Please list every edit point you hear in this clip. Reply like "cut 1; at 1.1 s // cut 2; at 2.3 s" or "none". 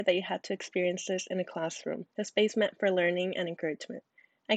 cut 1; at 2.1 s